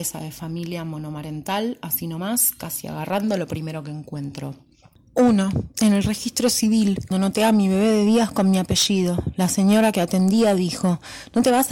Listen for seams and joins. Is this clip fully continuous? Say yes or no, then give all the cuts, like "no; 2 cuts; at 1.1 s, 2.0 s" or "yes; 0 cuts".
no; 1 cut; at 7.1 s